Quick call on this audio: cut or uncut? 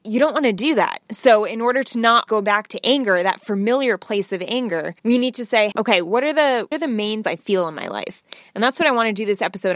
cut